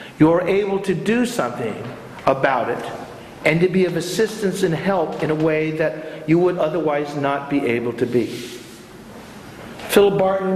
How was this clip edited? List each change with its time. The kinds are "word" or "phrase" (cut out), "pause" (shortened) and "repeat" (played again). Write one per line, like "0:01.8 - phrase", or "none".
none